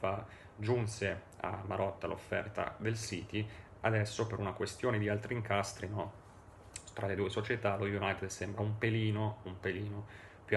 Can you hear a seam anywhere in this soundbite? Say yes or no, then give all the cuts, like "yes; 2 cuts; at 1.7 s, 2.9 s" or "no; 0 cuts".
no; 0 cuts